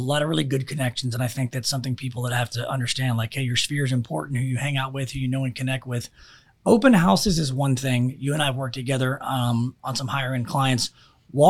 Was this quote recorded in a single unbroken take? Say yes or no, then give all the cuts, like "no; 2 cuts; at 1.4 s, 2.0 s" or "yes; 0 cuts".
yes; 0 cuts